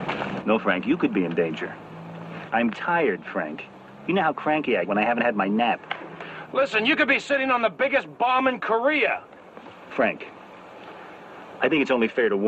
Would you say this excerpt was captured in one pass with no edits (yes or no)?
no